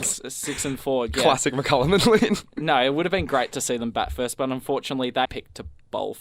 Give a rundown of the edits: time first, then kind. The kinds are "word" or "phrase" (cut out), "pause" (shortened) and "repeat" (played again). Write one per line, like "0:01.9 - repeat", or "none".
0:05.2 - word